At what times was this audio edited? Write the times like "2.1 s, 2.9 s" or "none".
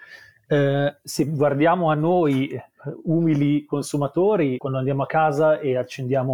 4.6 s